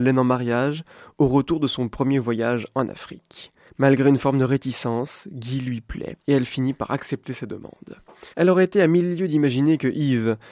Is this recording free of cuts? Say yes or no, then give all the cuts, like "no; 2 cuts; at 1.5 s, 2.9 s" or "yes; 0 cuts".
no; 3 cuts; at 3.7 s, 6.2 s, 8.3 s